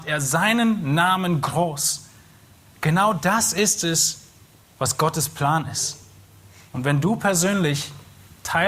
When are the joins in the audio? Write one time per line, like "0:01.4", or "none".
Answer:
none

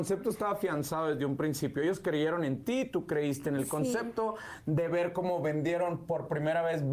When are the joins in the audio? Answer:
none

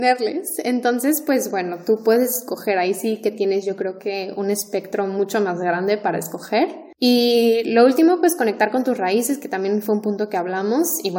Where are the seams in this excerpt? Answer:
none

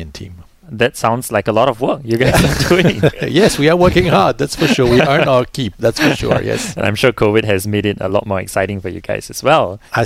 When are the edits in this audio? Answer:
none

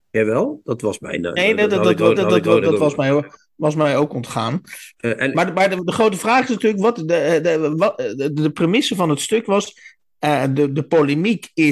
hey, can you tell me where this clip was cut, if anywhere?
0:02.2
0:04.9

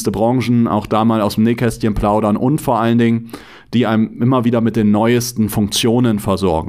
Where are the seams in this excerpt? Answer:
none

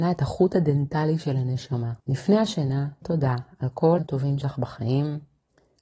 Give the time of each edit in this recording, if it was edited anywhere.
0:02.0
0:03.0
0:04.0
0:04.4

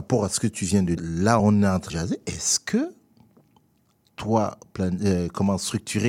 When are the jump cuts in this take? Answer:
0:01.0
0:01.4
0:01.9

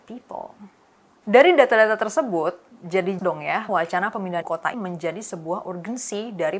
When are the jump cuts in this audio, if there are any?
0:03.2
0:03.7
0:04.4
0:04.7

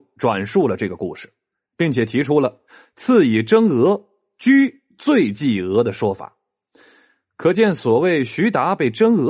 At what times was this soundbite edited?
none

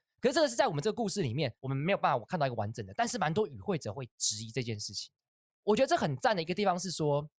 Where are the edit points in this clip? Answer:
0:01.6

